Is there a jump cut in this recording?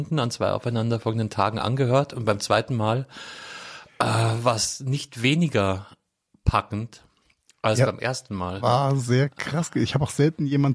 no; 0 cuts

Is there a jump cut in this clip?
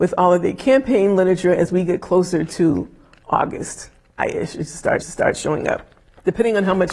yes; 2 cuts; at 4.2 s, 5.0 s

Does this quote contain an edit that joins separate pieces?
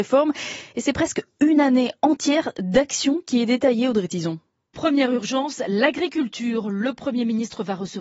no; 0 cuts

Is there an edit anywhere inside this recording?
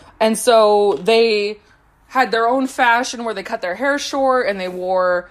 no; 0 cuts

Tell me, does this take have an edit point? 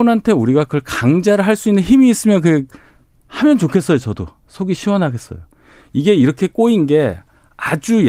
no; 0 cuts

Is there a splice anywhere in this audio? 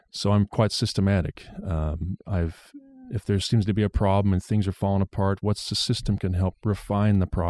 no; 0 cuts

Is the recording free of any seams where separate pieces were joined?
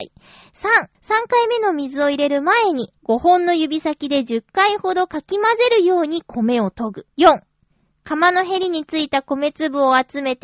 no; 3 cuts; at 0.9 s, 3.0 s, 7.1 s

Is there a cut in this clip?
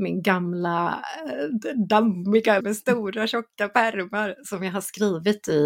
yes; 1 cut; at 2.6 s

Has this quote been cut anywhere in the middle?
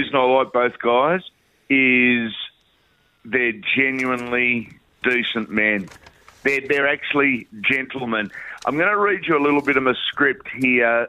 no; 0 cuts

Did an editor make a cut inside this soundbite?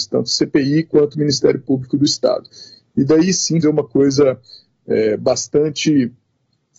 yes; 1 cut; at 3.6 s

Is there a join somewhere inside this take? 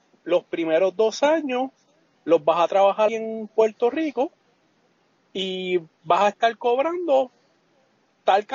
yes; 1 cut; at 3.1 s

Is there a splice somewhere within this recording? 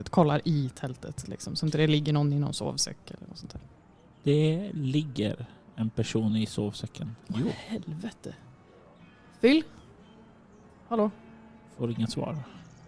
yes; 1 cut; at 1.2 s

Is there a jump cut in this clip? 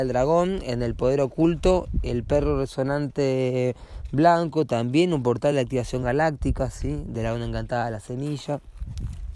no; 0 cuts

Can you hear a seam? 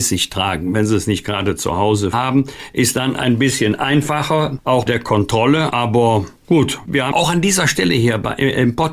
yes; 3 cuts; at 2.1 s, 4.9 s, 7.1 s

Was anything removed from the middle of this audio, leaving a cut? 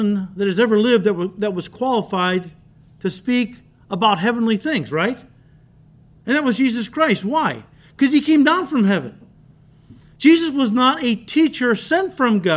no; 0 cuts

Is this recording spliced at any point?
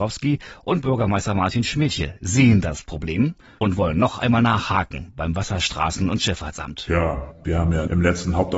no; 0 cuts

